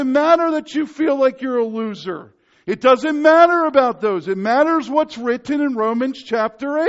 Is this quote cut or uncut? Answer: uncut